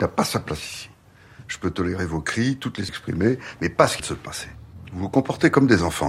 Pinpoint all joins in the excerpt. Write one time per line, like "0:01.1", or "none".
0:02.9
0:04.0